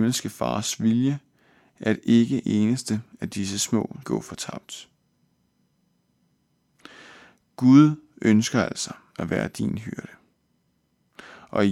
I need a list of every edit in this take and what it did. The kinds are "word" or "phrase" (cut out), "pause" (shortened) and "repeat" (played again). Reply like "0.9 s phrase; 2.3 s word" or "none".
2.4 s word; 4.0 s word

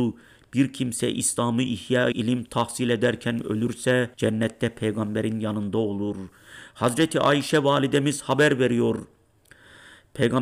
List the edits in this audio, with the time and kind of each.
2.1 s word; 4.1 s pause

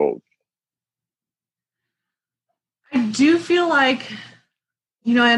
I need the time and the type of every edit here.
none

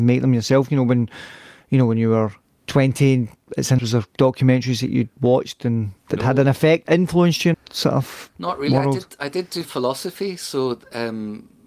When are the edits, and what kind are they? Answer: 2.4 s pause; 3.8 s word; 5.1 s pause; 6.0 s pause; 6.8 s phrase; 7.5 s word; 8.4 s pause; 9.6 s word

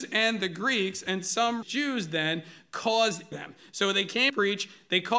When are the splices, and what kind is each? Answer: 1.6 s word; 3.3 s phrase; 4.3 s word

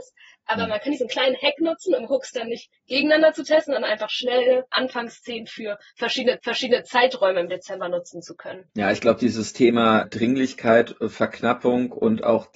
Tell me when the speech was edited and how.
4.7 s word; 6.4 s repeat; 8.7 s pause; 10.0 s word

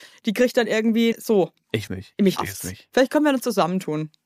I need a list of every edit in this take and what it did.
1.1 s word; 1.9 s phrase; 2.4 s word

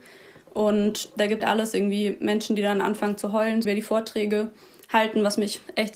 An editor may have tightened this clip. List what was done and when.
1.4 s word; 3.6 s word

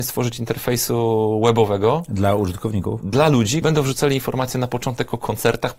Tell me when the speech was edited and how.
3.6 s word

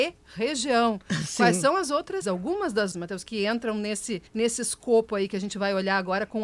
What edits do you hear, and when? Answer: 2.2 s word; 2.9 s phrase; 4.3 s pause

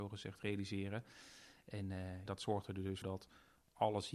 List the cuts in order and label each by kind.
2.3 s word; 3.0 s word

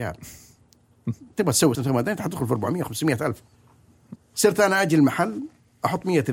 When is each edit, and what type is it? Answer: 1.7 s word; 4.2 s word

